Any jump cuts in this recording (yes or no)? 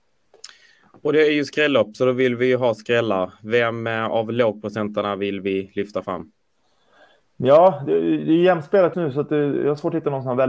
yes